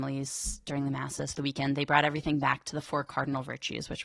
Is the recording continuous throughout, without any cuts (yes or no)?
no